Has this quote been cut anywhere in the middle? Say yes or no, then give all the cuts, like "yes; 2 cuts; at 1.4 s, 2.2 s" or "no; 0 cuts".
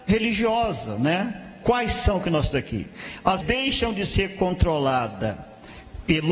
yes; 2 cuts; at 2.5 s, 3.4 s